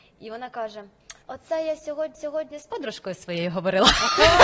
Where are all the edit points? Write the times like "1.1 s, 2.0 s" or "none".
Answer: 1.2 s, 2.1 s

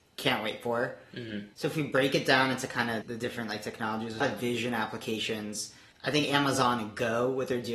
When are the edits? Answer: 1.5 s, 3.0 s, 4.2 s, 5.9 s

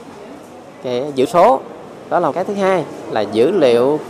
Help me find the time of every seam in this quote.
1.2 s, 2.3 s

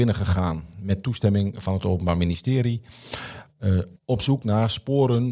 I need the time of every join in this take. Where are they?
4.0 s

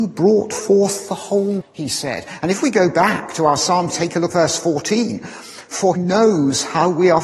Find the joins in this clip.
1.6 s, 3.9 s, 4.3 s, 6.0 s

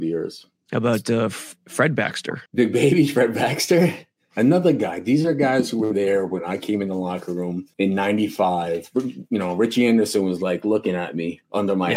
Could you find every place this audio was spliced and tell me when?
2.5 s, 7.7 s

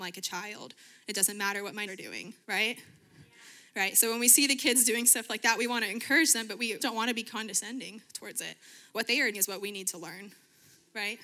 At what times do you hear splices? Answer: 1.9 s, 2.4 s, 6.8 s, 9.3 s

